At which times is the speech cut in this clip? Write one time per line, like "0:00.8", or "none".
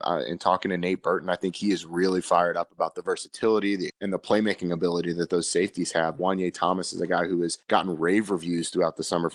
0:03.9
0:07.6